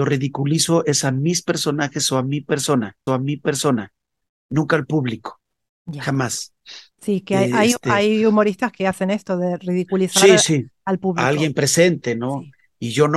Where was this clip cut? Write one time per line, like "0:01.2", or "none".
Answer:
0:03.1